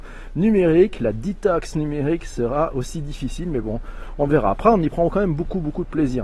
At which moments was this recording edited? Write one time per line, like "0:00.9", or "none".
none